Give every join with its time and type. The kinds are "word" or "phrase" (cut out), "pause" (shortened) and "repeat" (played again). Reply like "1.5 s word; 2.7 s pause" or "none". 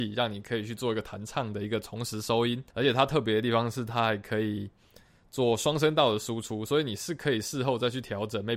2.7 s pause